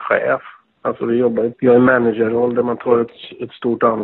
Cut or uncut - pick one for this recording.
cut